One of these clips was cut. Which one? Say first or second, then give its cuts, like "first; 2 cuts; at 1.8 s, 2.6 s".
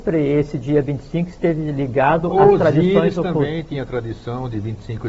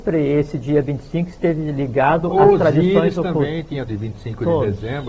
second; 1 cut; at 3.9 s